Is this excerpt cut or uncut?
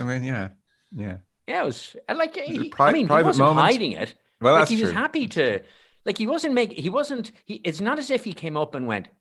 uncut